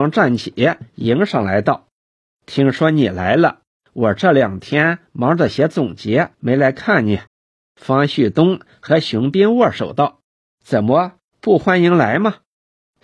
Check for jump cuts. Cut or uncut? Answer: cut